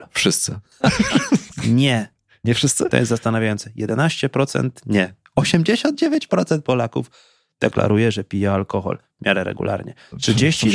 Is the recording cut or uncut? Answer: uncut